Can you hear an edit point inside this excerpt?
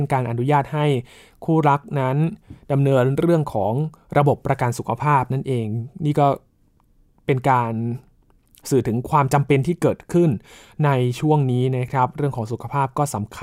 no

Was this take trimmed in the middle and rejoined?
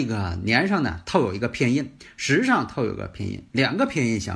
no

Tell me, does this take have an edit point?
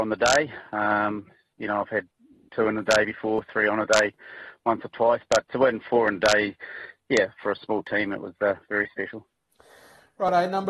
yes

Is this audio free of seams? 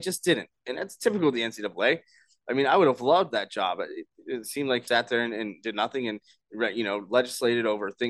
no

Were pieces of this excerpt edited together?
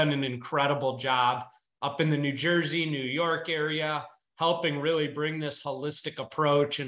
no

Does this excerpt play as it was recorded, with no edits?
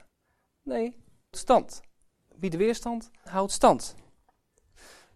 no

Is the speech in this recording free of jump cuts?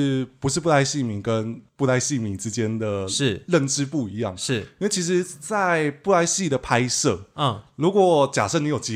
no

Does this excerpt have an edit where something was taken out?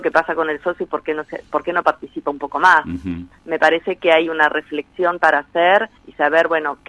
yes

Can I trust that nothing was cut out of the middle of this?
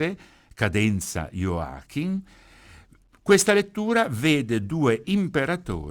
yes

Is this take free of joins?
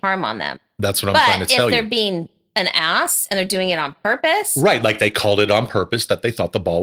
yes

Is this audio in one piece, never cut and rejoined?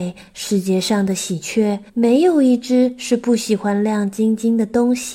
no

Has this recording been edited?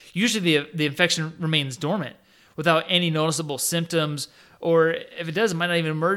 no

